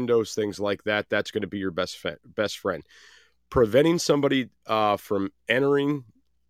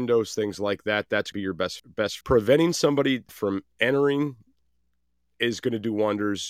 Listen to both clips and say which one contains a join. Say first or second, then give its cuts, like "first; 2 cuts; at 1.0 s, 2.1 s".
second; 4 cuts; at 1.3 s, 1.8 s, 2.2 s, 3.3 s